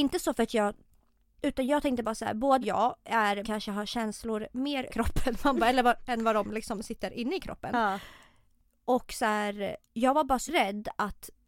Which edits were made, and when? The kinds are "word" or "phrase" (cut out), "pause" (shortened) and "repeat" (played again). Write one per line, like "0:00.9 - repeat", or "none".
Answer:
0:02.6 - phrase
0:03.4 - phrase
0:04.9 - word
0:09.8 - pause
0:10.5 - word